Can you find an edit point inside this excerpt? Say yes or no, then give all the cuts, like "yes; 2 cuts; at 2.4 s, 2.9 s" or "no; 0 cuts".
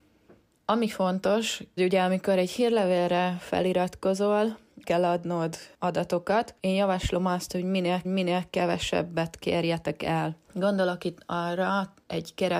yes; 5 cuts; at 1.8 s, 4.8 s, 6.6 s, 8.0 s, 10.4 s